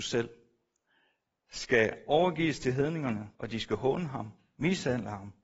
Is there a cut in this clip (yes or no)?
yes